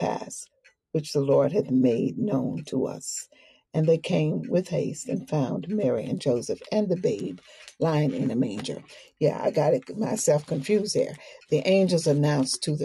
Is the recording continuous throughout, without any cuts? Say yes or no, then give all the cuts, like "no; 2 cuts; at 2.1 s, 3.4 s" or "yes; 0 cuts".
yes; 0 cuts